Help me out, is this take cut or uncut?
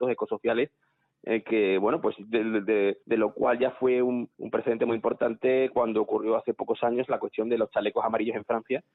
cut